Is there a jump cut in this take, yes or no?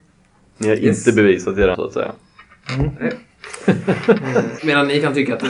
yes